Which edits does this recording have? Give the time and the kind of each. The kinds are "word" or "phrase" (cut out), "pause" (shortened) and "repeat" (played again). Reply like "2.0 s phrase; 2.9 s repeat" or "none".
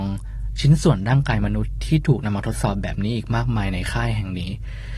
none